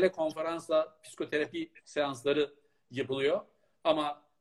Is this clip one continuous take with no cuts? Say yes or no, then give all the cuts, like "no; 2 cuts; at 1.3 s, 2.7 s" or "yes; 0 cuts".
yes; 0 cuts